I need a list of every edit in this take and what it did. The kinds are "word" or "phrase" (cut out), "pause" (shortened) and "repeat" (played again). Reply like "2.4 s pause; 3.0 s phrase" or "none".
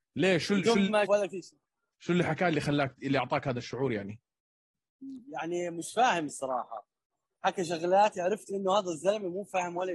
1.0 s word